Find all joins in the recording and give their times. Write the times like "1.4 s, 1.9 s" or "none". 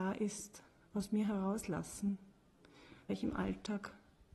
3.1 s